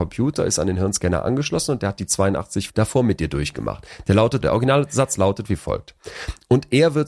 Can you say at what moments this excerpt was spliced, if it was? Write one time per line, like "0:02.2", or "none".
0:02.7
0:04.4